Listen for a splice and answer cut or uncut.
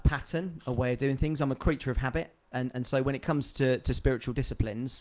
uncut